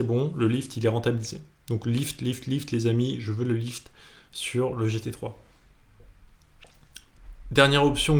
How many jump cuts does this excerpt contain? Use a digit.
0